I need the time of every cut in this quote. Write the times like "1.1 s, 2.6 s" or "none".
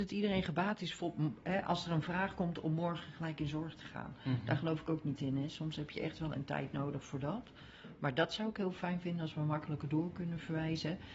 6.3 s